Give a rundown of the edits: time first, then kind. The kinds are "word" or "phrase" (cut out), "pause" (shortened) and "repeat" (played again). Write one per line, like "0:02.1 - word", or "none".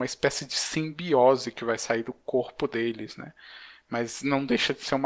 none